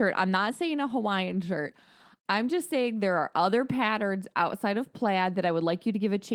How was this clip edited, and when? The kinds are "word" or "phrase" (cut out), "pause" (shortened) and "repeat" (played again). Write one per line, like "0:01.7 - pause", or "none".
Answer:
none